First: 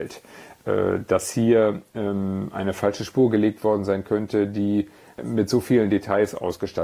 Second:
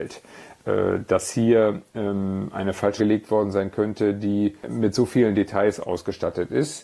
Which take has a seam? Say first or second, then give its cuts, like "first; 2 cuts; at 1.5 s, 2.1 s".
second; 2 cuts; at 3.0 s, 4.6 s